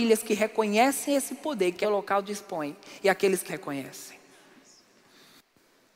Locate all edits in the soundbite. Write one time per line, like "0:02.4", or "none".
0:01.8
0:03.5